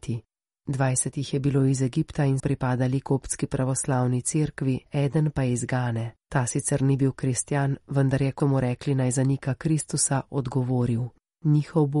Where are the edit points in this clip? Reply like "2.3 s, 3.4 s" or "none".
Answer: 2.4 s, 6.2 s, 8.4 s